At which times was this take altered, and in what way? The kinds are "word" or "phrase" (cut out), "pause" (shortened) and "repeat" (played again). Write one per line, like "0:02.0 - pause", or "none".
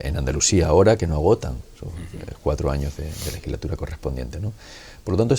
none